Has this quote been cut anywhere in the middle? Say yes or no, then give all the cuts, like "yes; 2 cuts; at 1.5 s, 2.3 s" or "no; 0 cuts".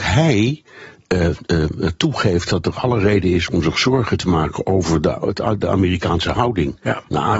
no; 0 cuts